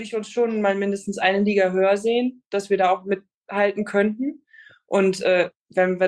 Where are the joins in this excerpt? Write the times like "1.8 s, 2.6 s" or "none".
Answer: none